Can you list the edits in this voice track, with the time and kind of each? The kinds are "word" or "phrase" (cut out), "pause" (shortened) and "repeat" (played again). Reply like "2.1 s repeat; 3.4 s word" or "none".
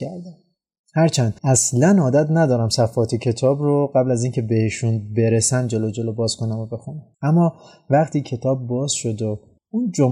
1.4 s pause; 7.1 s pause